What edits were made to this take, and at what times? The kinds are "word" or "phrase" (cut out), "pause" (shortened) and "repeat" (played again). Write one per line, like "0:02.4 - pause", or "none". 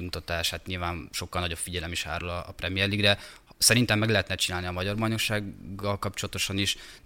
none